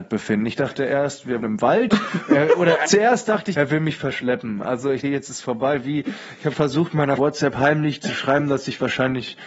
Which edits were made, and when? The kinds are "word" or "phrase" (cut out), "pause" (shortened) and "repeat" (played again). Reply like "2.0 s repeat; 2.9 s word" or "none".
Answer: 1.4 s word; 2.8 s word; 3.5 s word; 5.0 s phrase; 6.5 s word; 7.2 s phrase